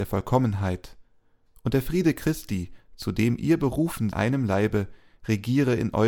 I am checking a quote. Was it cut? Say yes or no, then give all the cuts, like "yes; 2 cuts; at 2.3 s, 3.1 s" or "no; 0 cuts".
yes; 1 cut; at 4.1 s